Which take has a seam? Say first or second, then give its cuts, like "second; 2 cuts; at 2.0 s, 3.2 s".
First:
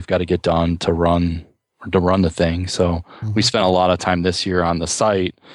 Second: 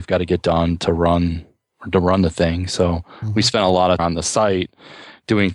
second; 1 cut; at 4.0 s